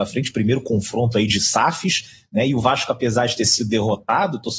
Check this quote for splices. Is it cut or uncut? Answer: uncut